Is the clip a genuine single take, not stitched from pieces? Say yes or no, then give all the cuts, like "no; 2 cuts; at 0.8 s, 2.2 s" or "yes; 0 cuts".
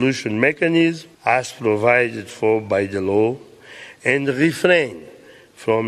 no; 1 cut; at 1.1 s